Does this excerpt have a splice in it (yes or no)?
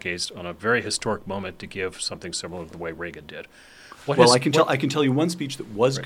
no